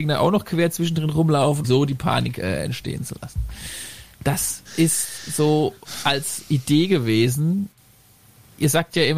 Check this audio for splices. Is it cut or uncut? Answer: cut